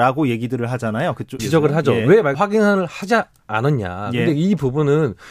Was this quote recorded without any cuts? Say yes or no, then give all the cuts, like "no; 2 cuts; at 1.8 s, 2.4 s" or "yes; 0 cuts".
no; 2 cuts; at 1.4 s, 2.3 s